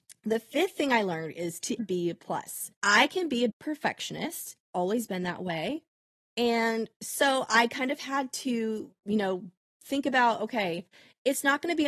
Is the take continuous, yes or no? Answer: no